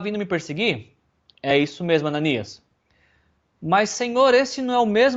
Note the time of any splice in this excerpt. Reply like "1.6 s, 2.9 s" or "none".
none